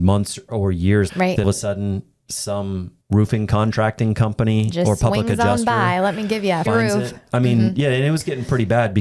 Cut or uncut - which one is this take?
cut